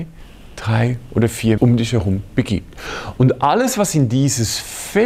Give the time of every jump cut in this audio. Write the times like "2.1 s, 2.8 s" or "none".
1.6 s